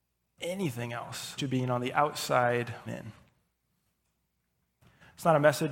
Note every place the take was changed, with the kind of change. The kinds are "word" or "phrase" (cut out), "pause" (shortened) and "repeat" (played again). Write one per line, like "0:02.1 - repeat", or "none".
0:01.4 - word
0:02.9 - word